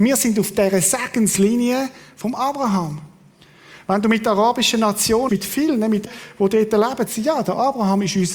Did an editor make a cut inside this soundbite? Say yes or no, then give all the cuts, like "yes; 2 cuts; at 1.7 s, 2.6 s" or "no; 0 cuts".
yes; 3 cuts; at 5.3 s, 6.1 s, 7.1 s